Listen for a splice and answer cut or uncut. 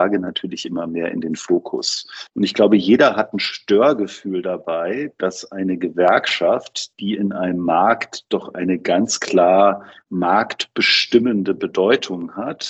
cut